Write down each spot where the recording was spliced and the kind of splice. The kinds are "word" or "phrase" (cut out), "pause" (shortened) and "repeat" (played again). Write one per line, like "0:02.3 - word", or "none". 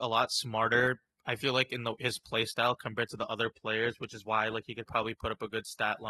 none